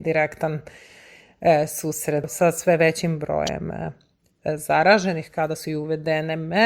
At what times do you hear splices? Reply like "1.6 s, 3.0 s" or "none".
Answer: none

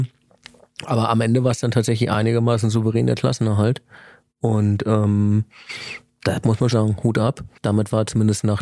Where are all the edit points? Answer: 6.7 s, 7.6 s

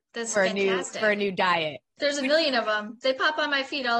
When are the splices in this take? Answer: 1.9 s

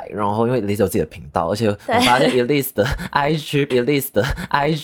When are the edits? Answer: 3.7 s

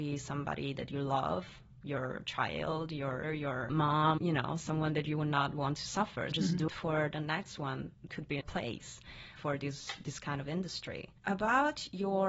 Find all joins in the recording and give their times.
3.2 s, 4.2 s, 6.3 s, 6.7 s, 8.1 s, 8.4 s, 9.4 s, 11.2 s

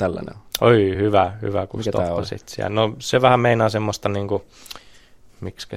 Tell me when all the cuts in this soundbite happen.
none

